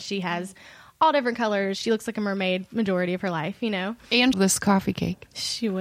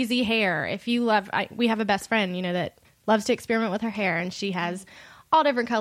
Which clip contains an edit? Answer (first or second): first